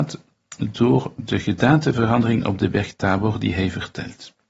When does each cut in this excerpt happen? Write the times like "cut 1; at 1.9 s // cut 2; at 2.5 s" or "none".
none